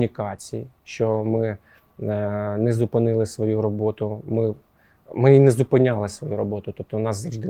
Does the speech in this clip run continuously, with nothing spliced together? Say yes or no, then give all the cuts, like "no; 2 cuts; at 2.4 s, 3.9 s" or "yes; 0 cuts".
yes; 0 cuts